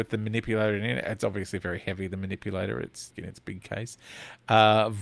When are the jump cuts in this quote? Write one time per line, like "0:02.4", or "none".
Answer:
0:03.1